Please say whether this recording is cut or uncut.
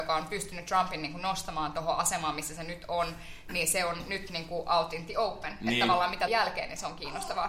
cut